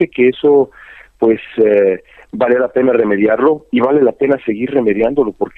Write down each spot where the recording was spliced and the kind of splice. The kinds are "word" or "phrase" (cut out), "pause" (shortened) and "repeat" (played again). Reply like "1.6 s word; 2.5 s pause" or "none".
none